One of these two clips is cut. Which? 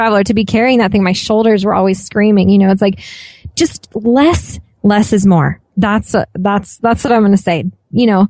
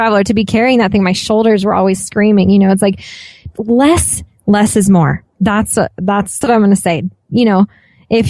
second; 2 cuts; at 3.5 s, 6.4 s

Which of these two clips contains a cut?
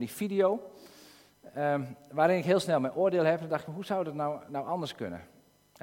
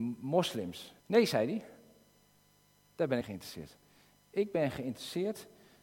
second; 2 cuts; at 1.0 s, 3.2 s

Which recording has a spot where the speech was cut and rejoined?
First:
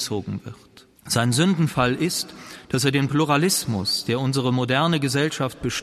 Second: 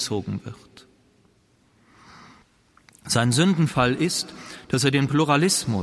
first; 1 cut; at 1.0 s

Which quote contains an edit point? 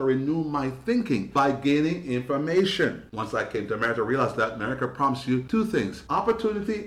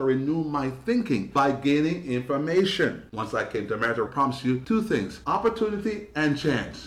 second; 1 cut; at 4.1 s

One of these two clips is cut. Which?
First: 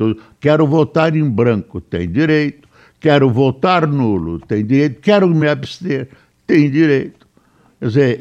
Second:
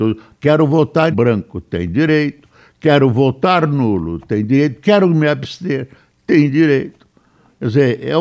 second; 1 cut; at 1.1 s

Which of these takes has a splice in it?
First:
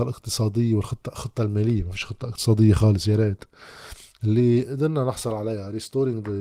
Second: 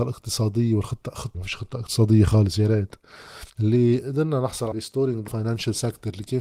second; 4 cuts; at 1.3 s, 3.5 s, 4.7 s, 5.3 s

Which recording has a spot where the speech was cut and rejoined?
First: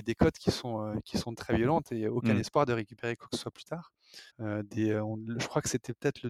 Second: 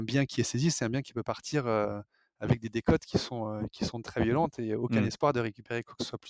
first; 1 cut; at 4.3 s

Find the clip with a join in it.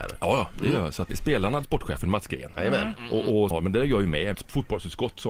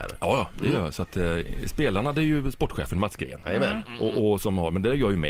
first; 4 cuts; at 1.1 s, 1.6 s, 3.5 s, 4.3 s

